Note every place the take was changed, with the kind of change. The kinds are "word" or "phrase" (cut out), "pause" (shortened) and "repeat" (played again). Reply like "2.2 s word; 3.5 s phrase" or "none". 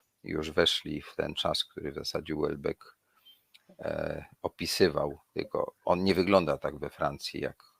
5.8 s pause